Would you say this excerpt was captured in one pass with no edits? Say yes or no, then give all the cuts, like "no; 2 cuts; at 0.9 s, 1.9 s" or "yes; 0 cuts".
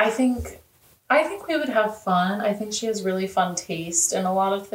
yes; 0 cuts